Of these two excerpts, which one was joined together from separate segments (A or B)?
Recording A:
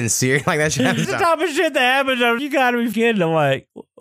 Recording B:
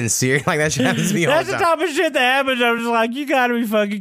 A